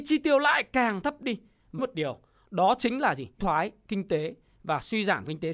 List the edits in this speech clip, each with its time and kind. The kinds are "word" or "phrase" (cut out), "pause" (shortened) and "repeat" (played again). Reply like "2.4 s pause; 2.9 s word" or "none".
1.8 s phrase; 3.4 s word